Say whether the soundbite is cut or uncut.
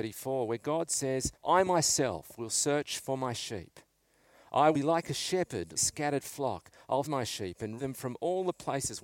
cut